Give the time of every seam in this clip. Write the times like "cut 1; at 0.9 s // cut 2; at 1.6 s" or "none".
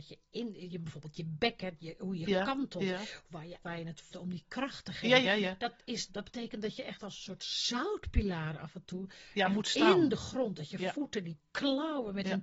cut 1; at 3.6 s // cut 2; at 4.1 s // cut 3; at 5.2 s // cut 4; at 6.1 s